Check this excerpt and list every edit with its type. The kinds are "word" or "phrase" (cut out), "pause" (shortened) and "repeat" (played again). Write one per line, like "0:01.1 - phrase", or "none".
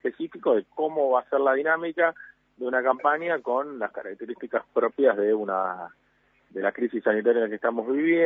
none

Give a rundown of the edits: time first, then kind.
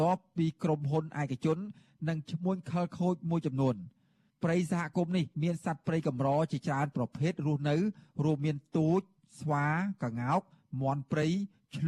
0:05.3 - pause

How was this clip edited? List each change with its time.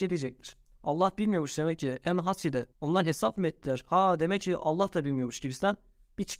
0:02.7 - pause

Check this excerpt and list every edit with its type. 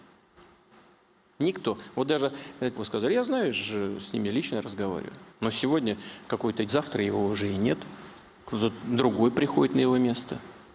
0:02.7 - phrase
0:05.3 - pause
0:06.7 - phrase

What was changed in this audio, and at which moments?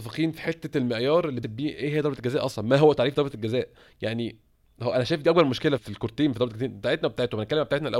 0:01.4 - word
0:05.8 - word

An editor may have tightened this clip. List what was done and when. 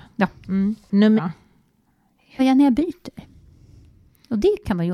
0:01.2 - word
0:02.4 - word

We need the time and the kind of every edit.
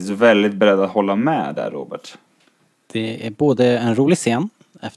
none

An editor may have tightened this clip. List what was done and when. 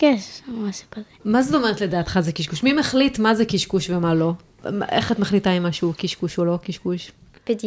none

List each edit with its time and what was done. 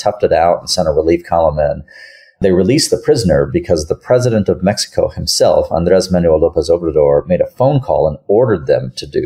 none

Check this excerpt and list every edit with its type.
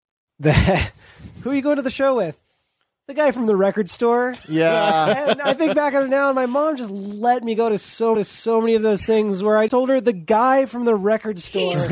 0:08.1 - repeat
0:09.7 - word

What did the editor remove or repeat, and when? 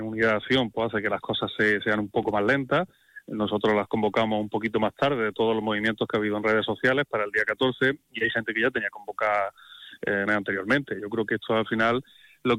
0:10.3 - word

